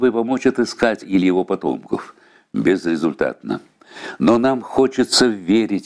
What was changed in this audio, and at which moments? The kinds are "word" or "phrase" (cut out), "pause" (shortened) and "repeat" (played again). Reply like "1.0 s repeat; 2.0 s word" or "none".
1.0 s word